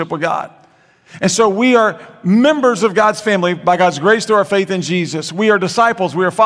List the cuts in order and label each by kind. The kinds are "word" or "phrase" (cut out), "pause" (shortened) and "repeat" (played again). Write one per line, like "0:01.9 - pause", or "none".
none